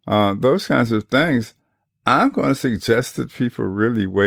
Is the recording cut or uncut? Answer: uncut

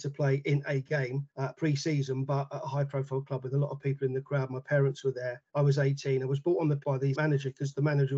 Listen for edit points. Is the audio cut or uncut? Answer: cut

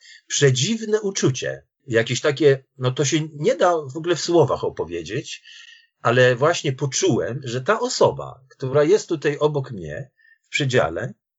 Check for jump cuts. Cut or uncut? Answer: uncut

